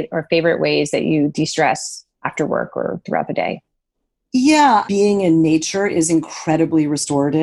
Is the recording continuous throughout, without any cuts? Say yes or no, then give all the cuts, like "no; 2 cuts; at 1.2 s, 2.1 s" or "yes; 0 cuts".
no; 2 cuts; at 2.1 s, 4.8 s